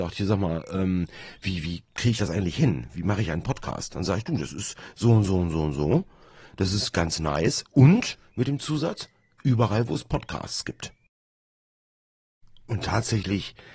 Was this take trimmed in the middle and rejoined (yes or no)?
no